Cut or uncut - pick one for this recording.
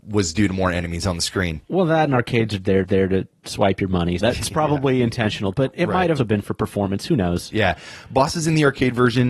cut